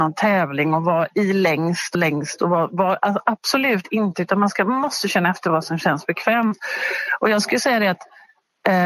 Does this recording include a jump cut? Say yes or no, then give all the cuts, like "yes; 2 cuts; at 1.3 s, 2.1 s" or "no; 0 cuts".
yes; 1 cut; at 1.9 s